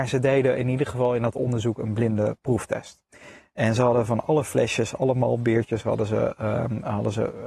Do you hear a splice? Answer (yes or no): no